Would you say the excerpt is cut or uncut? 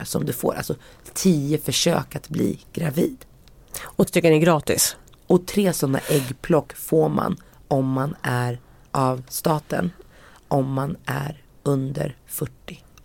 cut